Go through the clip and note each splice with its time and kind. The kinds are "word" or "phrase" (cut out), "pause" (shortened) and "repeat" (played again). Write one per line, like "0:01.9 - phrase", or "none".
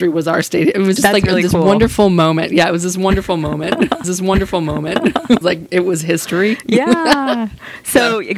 0:01.0 - word
0:04.0 - repeat
0:05.4 - phrase